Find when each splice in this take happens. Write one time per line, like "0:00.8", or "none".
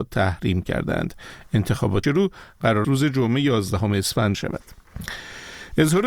0:02.0
0:02.8
0:04.3